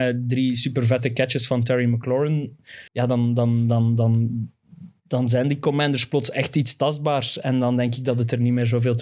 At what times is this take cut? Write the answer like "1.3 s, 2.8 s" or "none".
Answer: 2.9 s